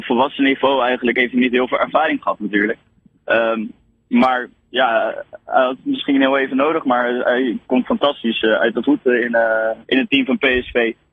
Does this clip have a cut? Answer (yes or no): yes